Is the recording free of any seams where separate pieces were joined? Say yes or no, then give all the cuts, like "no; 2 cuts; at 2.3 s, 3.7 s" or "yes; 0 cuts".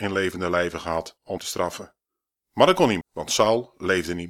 no; 2 cuts; at 1.4 s, 3.0 s